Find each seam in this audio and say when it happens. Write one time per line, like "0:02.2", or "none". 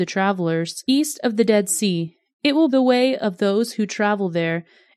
0:02.7